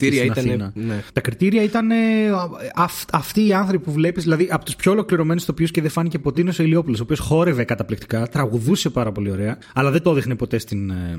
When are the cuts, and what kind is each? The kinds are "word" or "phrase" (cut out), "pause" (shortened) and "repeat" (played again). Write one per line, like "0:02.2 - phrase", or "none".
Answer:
0:06.3 - phrase